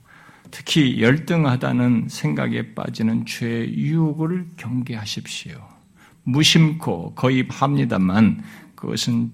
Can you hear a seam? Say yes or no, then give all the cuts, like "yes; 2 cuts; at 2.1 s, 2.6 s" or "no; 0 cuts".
yes; 1 cut; at 7.5 s